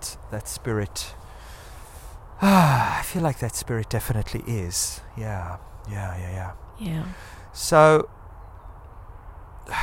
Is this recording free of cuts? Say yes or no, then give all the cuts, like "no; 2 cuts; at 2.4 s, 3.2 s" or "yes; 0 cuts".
yes; 0 cuts